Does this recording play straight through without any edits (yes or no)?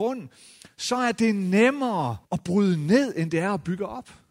no